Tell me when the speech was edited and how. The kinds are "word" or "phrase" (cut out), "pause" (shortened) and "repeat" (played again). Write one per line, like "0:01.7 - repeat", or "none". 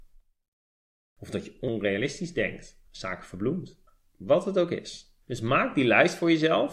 0:02.9 - pause
0:03.9 - pause
0:05.2 - pause